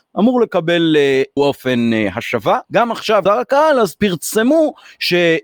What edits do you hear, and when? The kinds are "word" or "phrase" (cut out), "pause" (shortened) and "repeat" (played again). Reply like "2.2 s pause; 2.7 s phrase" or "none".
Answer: 1.4 s word; 2.6 s pause; 3.3 s word

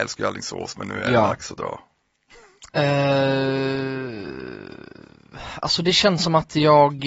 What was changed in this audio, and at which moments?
2.7 s pause

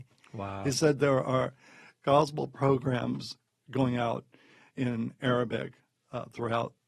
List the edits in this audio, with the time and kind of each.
none

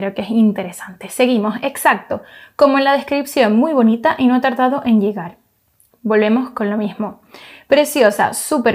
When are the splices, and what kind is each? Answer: none

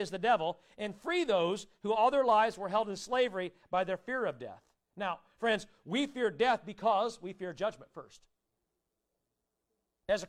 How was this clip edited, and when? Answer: none

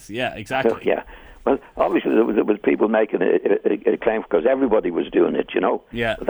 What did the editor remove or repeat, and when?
none

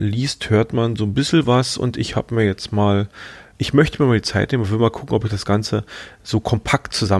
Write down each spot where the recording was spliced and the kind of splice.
none

